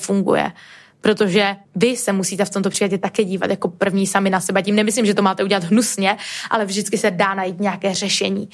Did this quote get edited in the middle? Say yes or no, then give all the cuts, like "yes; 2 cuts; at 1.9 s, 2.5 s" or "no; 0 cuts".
yes; 1 cut; at 1.6 s